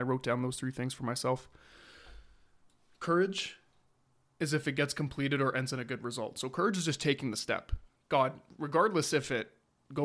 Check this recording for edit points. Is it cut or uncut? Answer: uncut